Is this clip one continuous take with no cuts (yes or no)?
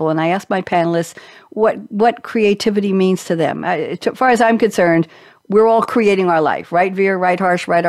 yes